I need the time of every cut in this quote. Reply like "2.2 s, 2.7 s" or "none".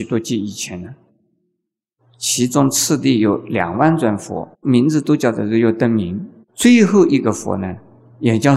4.5 s, 6.4 s